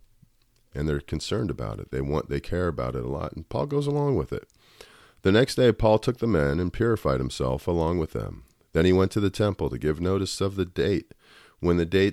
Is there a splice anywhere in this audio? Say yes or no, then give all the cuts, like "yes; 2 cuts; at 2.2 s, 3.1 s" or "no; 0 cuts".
no; 0 cuts